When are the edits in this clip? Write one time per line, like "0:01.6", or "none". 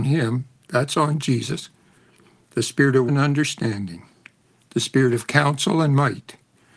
0:03.1